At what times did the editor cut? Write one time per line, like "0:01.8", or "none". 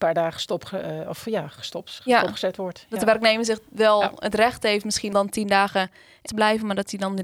0:05.1
0:06.3